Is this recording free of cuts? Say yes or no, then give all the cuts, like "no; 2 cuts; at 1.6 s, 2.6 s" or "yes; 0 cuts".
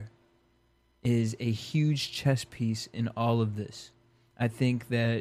yes; 0 cuts